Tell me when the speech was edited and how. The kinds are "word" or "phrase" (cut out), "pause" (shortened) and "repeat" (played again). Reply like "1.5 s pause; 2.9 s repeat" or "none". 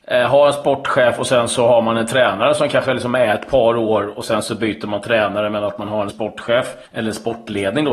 6.1 s word; 6.9 s pause